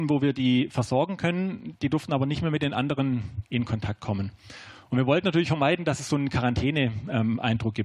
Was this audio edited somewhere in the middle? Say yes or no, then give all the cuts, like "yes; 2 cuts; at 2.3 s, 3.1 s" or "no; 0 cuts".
no; 0 cuts